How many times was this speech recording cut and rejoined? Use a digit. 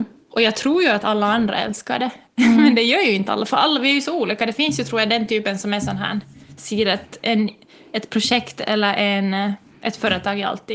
0